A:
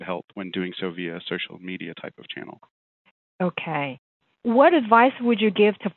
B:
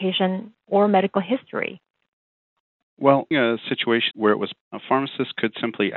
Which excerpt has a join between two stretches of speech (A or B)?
B